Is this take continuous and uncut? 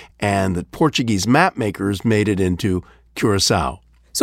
yes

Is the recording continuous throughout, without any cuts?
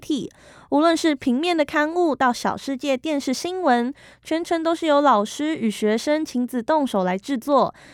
yes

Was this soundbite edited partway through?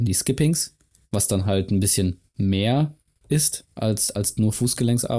no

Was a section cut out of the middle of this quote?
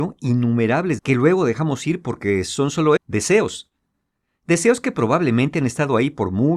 yes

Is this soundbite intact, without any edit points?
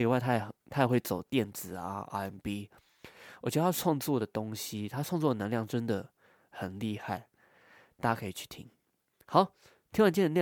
yes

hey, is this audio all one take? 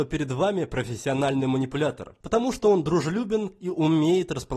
no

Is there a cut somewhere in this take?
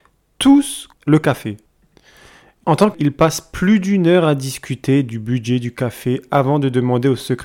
yes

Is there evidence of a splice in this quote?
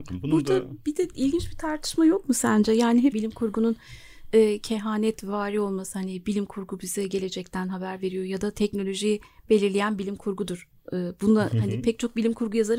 yes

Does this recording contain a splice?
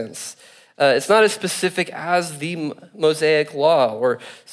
no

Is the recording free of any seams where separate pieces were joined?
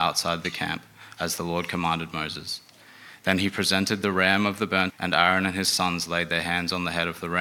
no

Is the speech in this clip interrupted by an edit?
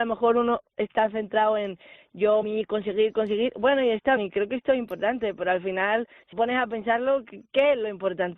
yes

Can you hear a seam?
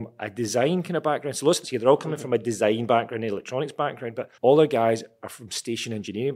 yes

